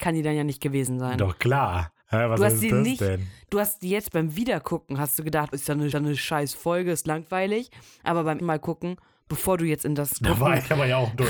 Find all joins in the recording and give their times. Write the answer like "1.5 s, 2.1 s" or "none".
2.0 s, 5.5 s, 5.9 s, 8.4 s